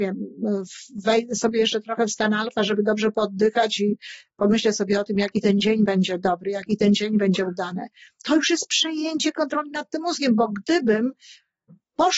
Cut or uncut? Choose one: uncut